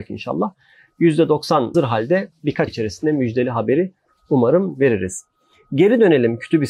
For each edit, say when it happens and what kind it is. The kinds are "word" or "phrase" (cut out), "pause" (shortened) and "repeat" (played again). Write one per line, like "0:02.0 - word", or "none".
0:01.7 - word
0:02.7 - word